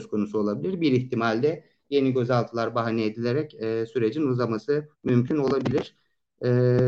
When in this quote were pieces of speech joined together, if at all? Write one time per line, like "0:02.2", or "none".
0:04.9